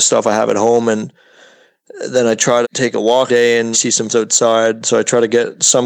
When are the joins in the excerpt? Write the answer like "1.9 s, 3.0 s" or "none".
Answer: 2.6 s, 3.3 s, 3.7 s, 4.1 s